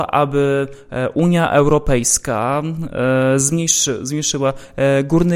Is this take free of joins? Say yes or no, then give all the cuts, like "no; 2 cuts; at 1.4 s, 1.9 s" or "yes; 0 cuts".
yes; 0 cuts